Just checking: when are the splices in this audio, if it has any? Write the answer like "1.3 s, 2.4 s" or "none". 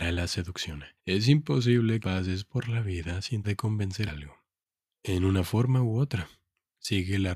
1.0 s, 2.0 s, 3.4 s, 4.1 s, 4.6 s